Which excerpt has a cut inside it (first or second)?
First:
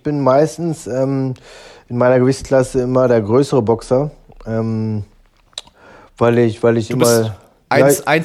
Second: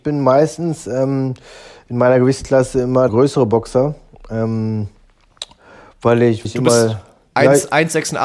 second